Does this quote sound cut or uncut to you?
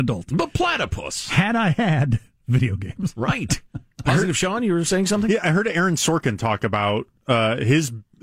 uncut